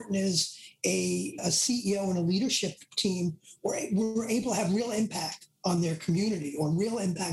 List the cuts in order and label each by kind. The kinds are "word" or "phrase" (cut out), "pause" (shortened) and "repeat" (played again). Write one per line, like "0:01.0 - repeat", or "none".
none

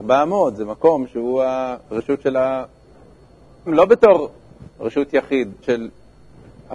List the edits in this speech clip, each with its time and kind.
0:01.8 - pause
0:03.7 - word
0:04.7 - pause
0:05.6 - word

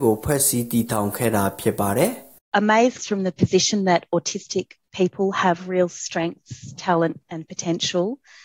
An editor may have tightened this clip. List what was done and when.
0:03.0 - word

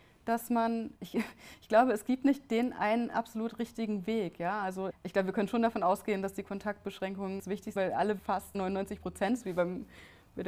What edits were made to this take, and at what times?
0:01.0 - word
0:04.9 - word
0:07.4 - word
0:07.8 - word
0:08.2 - word
0:08.5 - word

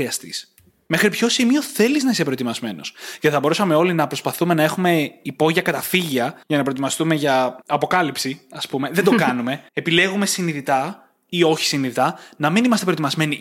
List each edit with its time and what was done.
0:06.4 - pause
0:07.6 - pause
0:09.7 - pause

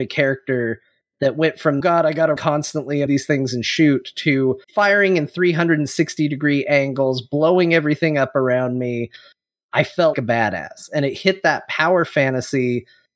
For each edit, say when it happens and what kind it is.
0:01.8 - phrase
0:02.4 - word
0:03.1 - word
0:04.6 - pause
0:10.1 - word

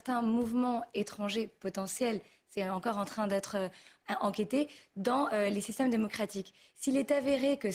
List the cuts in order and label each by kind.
none

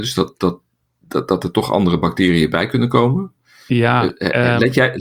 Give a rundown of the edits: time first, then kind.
none

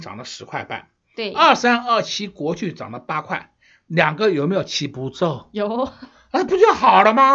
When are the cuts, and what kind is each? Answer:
none

